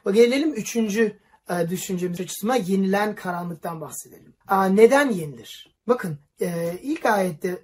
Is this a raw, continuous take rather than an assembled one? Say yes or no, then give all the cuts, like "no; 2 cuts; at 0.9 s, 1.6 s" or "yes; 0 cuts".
no; 2 cuts; at 2.2 s, 4.4 s